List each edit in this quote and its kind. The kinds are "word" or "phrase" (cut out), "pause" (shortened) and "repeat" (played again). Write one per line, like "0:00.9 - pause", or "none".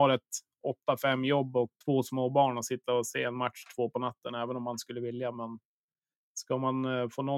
0:01.8 - pause